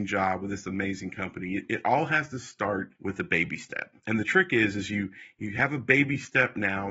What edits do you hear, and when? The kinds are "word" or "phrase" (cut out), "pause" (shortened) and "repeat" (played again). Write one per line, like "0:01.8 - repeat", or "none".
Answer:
0:03.0 - pause
0:04.0 - pause